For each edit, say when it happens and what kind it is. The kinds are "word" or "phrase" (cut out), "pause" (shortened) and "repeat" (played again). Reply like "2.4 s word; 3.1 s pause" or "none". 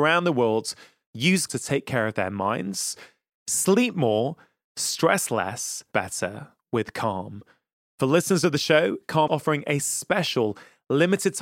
1.5 s word; 5.9 s word; 9.3 s word